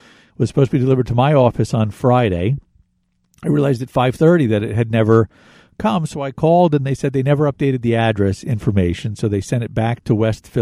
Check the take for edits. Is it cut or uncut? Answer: uncut